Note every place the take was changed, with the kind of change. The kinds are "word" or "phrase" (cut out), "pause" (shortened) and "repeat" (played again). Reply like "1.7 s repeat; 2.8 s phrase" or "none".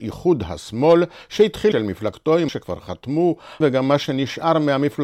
1.7 s word; 2.5 s word; 3.6 s word